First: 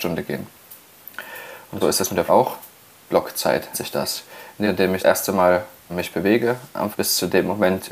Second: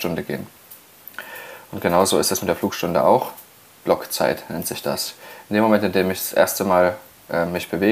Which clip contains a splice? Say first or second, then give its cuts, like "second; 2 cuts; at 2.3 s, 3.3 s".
first; 7 cuts; at 1.8 s, 2.3 s, 3.7 s, 4.6 s, 5.0 s, 5.9 s, 6.9 s